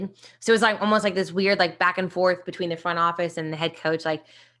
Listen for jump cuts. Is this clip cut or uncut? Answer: uncut